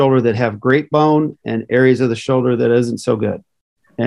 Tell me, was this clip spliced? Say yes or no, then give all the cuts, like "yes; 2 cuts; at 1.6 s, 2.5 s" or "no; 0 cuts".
no; 0 cuts